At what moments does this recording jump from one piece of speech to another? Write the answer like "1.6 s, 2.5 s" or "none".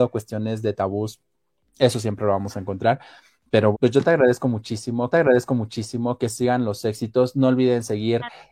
3.7 s, 5.1 s